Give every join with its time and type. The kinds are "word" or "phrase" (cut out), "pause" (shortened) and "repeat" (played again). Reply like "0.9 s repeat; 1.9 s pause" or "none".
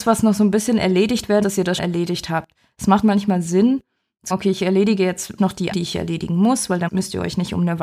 1.4 s word; 1.8 s word; 3.0 s word; 4.3 s word; 5.4 s word; 5.7 s word; 6.9 s word